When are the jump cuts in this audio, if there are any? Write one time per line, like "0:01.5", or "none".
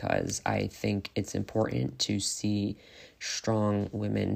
none